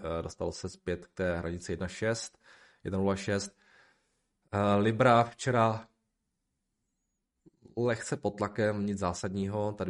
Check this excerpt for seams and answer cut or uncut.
uncut